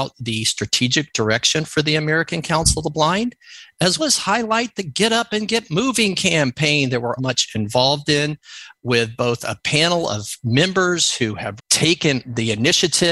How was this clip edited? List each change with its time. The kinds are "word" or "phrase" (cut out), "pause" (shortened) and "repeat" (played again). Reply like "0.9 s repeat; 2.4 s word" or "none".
4.0 s word; 7.2 s word; 11.6 s word